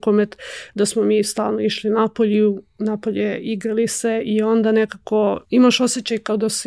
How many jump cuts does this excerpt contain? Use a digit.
1